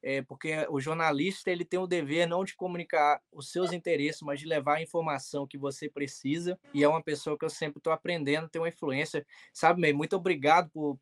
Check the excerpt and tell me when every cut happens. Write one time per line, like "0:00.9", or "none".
0:06.6